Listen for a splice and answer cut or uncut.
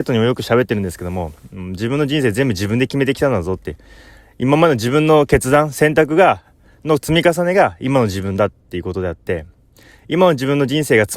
uncut